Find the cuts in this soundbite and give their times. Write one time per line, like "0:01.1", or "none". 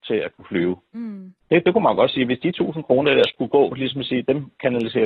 0:01.4